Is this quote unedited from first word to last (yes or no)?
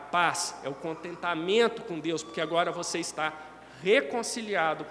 yes